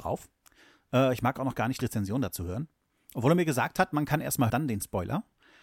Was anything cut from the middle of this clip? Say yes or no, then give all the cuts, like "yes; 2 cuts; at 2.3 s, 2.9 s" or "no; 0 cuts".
yes; 3 cuts; at 1.8 s, 2.9 s, 4.5 s